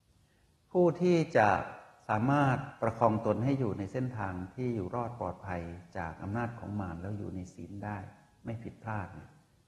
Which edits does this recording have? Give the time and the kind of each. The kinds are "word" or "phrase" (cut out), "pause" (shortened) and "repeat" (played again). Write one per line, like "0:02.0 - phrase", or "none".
none